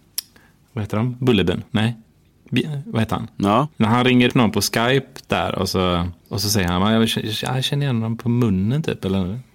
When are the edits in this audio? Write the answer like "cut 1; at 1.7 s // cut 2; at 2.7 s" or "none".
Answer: cut 1; at 1.7 s // cut 2; at 3.7 s // cut 3; at 4.3 s // cut 4; at 6.2 s